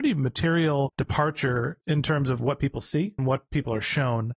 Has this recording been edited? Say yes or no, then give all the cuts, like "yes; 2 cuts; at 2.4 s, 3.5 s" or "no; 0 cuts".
yes; 1 cut; at 3.2 s